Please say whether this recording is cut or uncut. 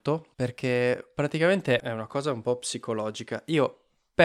cut